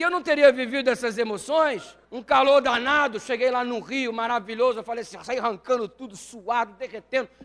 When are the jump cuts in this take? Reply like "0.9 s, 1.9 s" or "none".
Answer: 2.0 s